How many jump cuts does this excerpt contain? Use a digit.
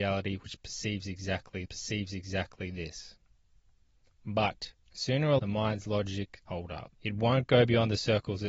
5